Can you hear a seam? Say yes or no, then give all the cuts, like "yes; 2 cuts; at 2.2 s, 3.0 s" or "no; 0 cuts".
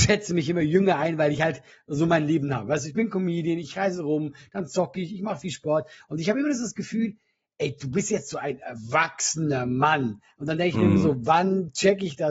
no; 0 cuts